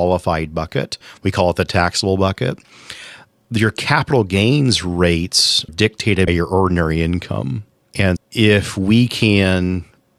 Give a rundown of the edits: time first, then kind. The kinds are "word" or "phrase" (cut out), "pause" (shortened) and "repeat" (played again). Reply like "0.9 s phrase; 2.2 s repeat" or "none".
5.7 s word; 6.3 s word; 8.2 s word